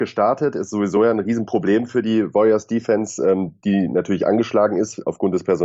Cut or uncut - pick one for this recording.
uncut